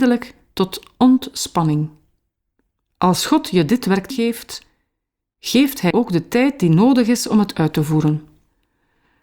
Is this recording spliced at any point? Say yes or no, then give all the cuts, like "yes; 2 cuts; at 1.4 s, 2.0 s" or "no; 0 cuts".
yes; 2 cuts; at 4.1 s, 5.9 s